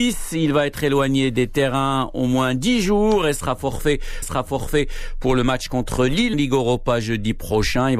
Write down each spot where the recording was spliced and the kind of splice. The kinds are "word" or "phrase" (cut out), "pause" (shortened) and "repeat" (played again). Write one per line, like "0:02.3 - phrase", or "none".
0:04.2 - repeat
0:06.3 - word